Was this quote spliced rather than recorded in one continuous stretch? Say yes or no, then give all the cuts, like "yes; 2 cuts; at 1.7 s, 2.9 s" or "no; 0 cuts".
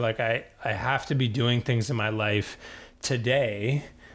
no; 0 cuts